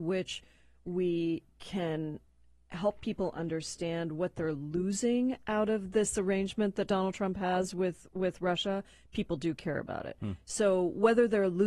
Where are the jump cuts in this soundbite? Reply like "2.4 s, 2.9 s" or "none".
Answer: none